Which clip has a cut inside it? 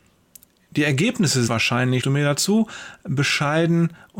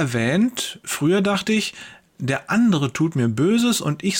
first; 2 cuts; at 1.5 s, 2.0 s

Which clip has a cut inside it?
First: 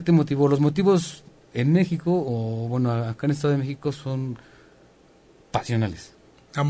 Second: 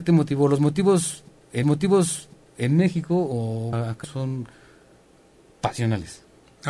second; 3 cuts; at 1.6 s, 3.7 s, 4.0 s

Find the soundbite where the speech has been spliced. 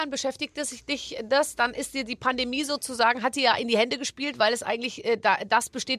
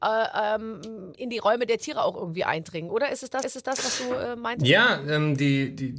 second; 2 cuts; at 1.1 s, 3.4 s

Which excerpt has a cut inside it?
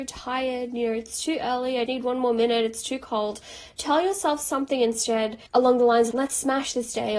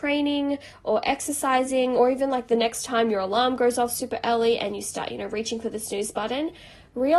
first; 3 cuts; at 1.9 s, 5.5 s, 6.1 s

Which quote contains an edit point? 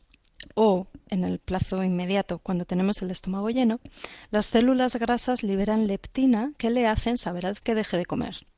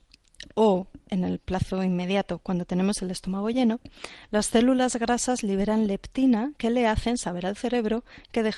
first; 1 cut; at 7.6 s

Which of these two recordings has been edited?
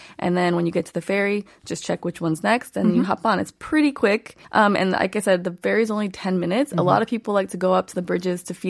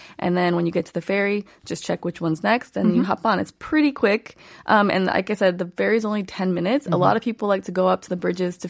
first; 1 cut; at 4.4 s

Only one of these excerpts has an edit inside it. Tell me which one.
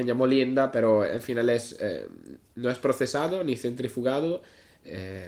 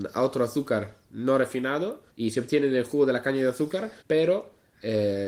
second; 2 cuts; at 2.1 s, 4.0 s

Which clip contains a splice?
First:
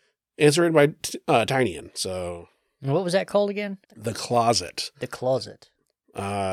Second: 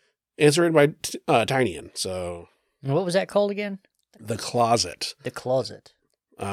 first; 1 cut; at 3.8 s

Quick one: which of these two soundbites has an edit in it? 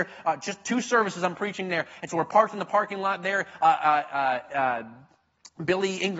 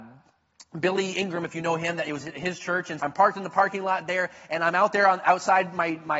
second; 1 cut; at 3.0 s

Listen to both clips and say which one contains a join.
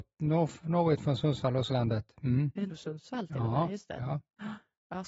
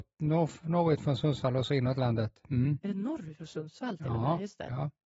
first; 2 cuts; at 1.7 s, 2.7 s

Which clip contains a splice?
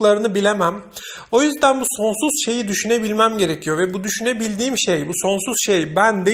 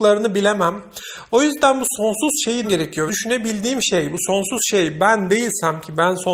second; 2 cuts; at 2.6 s, 3.1 s

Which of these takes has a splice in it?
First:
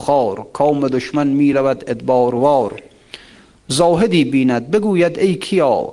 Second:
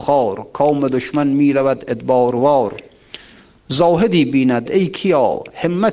second; 1 cut; at 4.7 s

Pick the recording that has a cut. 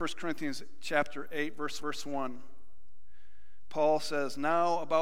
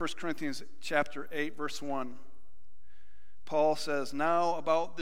first; 1 cut; at 1.8 s

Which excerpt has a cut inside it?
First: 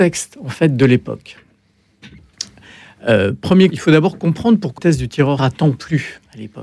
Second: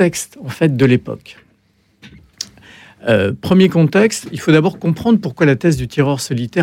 first; 3 cuts; at 3.7 s, 4.8 s, 5.4 s

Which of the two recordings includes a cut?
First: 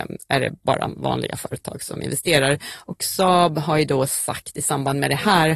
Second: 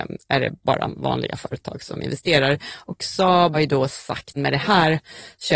second; 2 cuts; at 3.5 s, 4.4 s

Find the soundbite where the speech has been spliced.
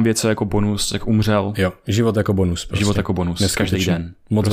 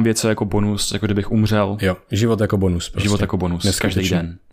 first; 1 cut; at 1.0 s

